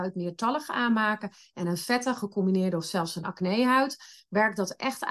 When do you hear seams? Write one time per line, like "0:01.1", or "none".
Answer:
none